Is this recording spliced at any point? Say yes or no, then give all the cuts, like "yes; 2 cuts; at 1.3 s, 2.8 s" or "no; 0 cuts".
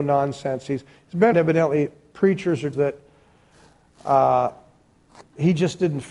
yes; 2 cuts; at 1.3 s, 2.7 s